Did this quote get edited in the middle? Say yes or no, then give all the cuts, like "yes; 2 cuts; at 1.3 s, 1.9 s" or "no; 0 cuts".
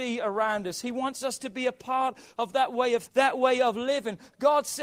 yes; 1 cut; at 3.1 s